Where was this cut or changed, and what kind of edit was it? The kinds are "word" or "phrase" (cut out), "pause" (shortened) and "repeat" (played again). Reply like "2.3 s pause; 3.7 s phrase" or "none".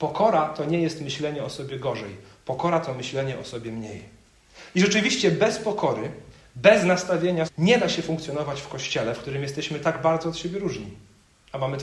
7.5 s word